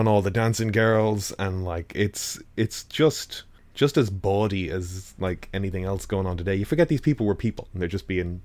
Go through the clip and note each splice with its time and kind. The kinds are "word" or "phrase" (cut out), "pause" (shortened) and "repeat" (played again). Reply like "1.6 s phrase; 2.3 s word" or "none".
none